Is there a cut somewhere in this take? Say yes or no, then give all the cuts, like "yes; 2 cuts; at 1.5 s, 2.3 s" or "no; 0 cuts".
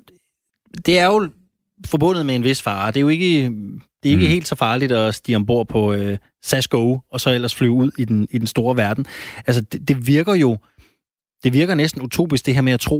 no; 0 cuts